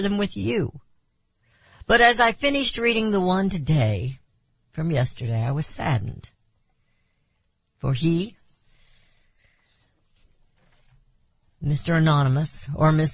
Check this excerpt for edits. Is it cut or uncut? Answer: uncut